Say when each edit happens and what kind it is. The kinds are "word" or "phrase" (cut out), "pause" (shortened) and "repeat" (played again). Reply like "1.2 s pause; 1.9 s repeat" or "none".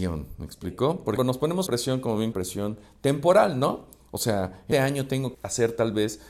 1.2 s word; 1.7 s word; 2.3 s phrase; 4.7 s word; 5.3 s word